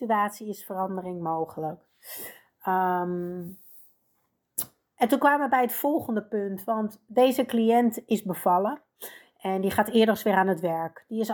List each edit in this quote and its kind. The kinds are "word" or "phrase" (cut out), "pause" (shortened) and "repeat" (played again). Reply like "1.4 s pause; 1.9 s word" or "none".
none

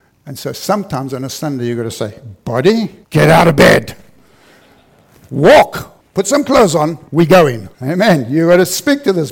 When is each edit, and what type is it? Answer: 3.0 s pause; 6.0 s pause; 7.1 s pause; 7.7 s pause

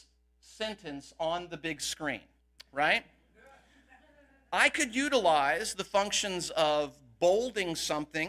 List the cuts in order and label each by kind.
none

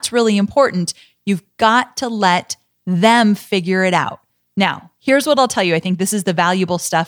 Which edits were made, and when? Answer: none

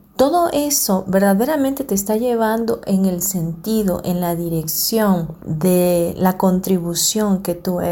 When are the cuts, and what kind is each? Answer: 5.4 s pause

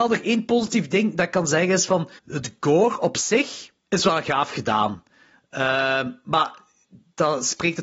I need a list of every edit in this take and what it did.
2.2 s pause; 3.8 s pause

